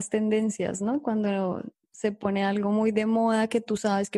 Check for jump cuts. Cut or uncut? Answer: uncut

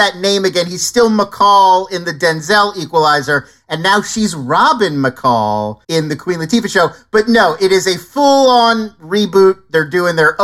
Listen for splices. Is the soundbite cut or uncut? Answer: cut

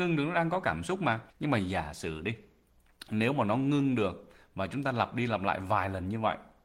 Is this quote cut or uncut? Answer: cut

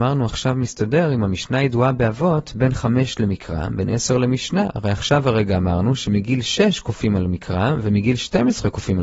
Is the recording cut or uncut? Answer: uncut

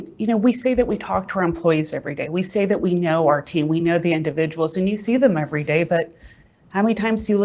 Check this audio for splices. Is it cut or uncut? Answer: uncut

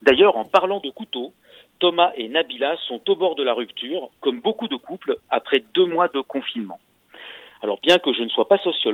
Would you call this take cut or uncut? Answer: uncut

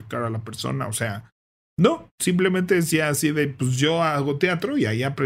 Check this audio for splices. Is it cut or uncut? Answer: uncut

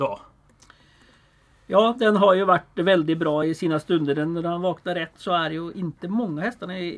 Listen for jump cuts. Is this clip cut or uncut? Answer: uncut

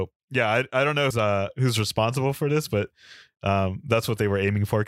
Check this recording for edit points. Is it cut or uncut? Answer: cut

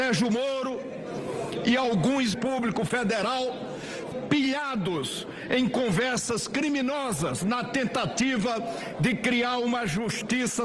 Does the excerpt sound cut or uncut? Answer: cut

